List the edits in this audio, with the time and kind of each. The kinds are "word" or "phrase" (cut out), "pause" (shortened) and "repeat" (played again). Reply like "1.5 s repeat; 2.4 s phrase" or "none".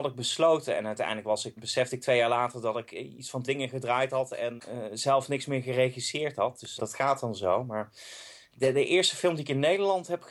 1.6 s word; 3.4 s word; 4.6 s word; 6.8 s word